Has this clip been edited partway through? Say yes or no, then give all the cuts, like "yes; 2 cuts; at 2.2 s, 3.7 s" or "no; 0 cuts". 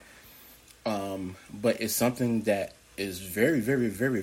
no; 0 cuts